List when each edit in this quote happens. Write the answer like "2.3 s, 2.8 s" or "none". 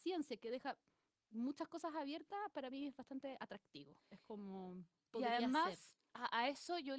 none